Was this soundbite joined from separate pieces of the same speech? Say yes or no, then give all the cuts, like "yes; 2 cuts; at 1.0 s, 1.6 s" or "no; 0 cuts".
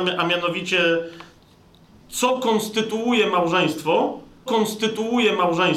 yes; 1 cut; at 4.5 s